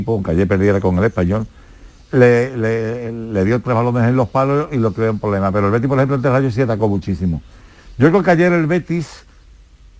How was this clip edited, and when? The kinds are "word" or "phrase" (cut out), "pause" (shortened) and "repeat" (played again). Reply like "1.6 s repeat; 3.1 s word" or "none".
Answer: none